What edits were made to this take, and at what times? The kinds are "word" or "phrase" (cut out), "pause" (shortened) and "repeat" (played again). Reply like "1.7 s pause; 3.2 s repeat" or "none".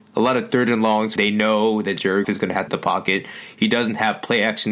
1.2 s phrase; 2.2 s word; 2.7 s phrase